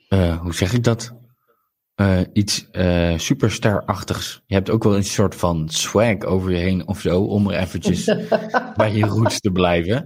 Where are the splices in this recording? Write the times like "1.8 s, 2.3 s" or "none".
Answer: none